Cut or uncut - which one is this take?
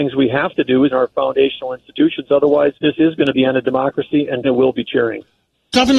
cut